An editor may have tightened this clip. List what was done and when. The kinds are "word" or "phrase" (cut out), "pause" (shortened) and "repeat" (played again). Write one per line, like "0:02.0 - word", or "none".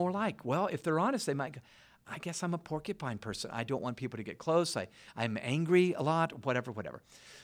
none

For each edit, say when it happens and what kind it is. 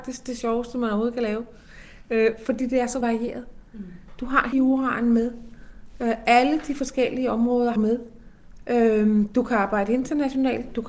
0:03.0 - word
0:04.5 - word
0:07.8 - word

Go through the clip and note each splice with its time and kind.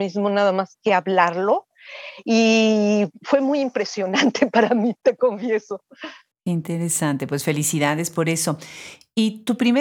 none

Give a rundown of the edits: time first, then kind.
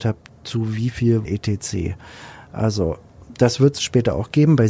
0:01.2 - word

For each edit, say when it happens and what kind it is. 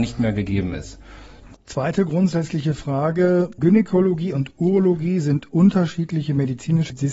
none

